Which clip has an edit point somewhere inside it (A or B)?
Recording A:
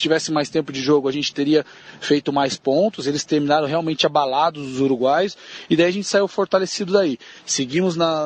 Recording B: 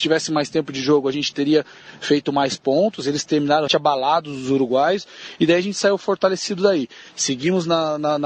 B